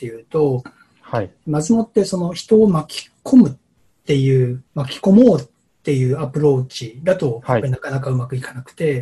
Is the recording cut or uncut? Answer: cut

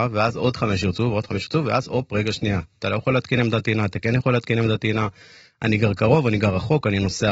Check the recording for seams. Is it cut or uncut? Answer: uncut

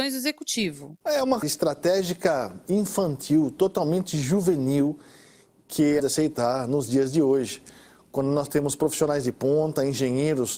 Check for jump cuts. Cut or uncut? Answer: cut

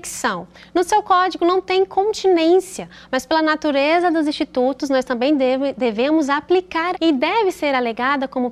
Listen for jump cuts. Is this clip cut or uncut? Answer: cut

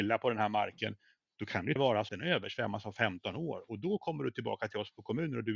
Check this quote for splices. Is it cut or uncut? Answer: cut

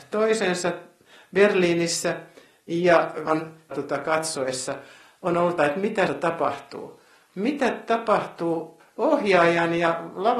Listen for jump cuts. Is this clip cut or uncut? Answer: cut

